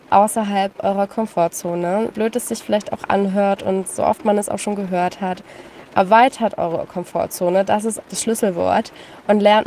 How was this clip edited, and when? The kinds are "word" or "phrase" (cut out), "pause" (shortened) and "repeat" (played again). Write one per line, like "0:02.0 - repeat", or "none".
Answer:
0:02.1 - word
0:08.0 - word